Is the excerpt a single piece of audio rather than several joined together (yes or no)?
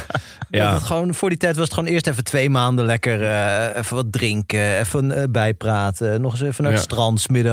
yes